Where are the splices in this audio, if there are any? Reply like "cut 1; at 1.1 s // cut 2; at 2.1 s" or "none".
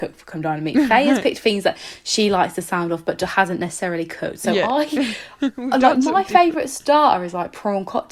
none